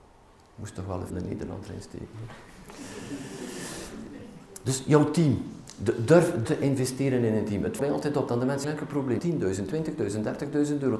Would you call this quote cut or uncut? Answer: cut